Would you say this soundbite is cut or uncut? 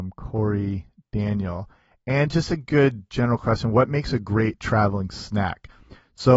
uncut